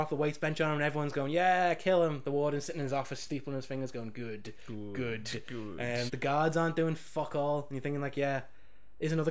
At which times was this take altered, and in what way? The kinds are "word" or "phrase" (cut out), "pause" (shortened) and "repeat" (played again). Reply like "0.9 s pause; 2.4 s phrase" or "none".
6.1 s word